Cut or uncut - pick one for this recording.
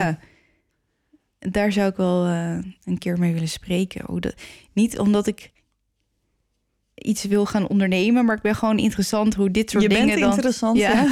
uncut